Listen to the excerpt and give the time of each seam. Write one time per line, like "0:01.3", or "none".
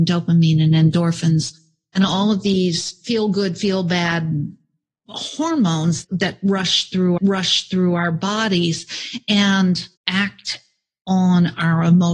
0:06.0
0:07.2
0:10.0